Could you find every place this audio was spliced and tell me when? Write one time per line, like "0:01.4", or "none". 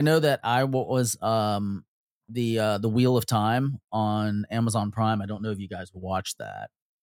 0:02.0